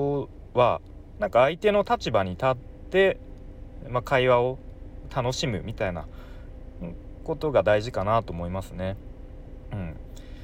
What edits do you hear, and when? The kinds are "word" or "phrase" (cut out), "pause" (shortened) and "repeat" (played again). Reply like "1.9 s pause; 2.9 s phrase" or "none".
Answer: none